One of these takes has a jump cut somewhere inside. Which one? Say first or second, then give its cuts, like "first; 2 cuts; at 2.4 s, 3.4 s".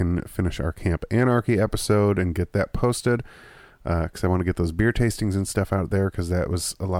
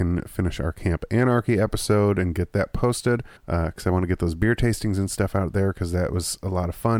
second; 1 cut; at 3.4 s